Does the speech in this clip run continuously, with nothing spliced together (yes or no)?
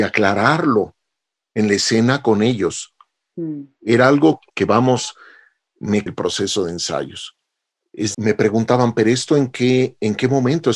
no